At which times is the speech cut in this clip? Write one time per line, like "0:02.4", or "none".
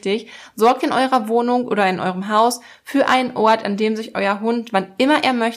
none